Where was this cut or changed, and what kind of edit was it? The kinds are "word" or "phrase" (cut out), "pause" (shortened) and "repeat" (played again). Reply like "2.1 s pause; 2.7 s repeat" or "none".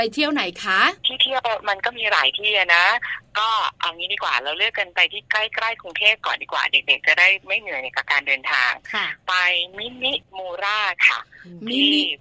1.0 s pause